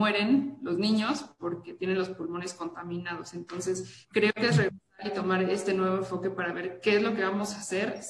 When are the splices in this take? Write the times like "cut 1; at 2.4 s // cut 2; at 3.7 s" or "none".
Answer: cut 1; at 4.0 s